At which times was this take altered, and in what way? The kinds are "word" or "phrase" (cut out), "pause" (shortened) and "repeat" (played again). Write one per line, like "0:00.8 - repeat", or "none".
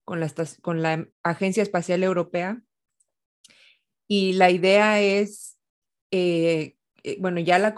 0:01.1 - pause